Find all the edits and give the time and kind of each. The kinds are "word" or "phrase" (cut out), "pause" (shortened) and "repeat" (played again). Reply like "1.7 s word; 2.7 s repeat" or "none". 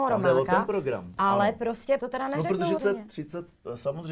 2.0 s word; 2.8 s word